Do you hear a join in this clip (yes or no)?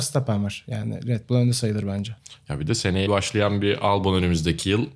yes